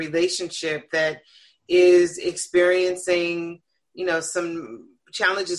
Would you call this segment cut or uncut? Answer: uncut